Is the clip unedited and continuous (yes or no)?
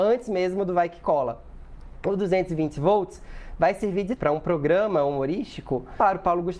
no